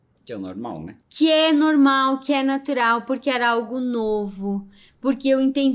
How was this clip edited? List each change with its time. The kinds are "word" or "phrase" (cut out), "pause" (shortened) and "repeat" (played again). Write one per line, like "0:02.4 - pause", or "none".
0:01.0 - pause